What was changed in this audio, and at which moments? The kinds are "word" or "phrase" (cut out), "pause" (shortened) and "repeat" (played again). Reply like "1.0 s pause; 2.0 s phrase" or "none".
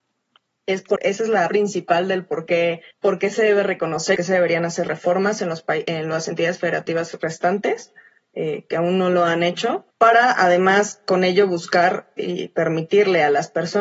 1.0 s word; 1.5 s word; 2.9 s pause; 4.1 s phrase; 4.8 s word; 9.9 s pause

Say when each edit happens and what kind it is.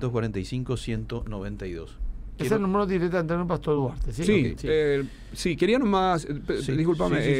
none

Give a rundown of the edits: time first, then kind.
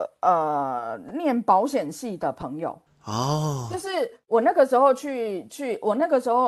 2.9 s pause

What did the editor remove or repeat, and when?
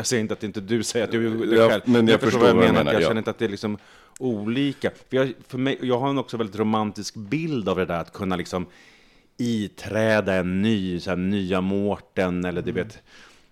none

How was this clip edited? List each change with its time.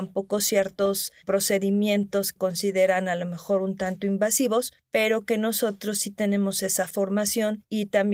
2.4 s word

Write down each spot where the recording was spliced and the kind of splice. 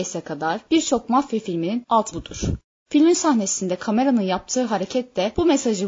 2.1 s word; 3.1 s word

